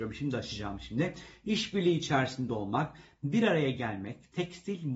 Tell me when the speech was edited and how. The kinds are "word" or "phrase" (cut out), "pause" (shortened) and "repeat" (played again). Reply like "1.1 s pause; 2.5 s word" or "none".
none